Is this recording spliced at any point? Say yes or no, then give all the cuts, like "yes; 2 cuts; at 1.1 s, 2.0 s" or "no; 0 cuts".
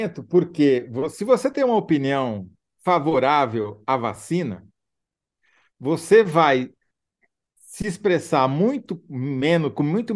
no; 0 cuts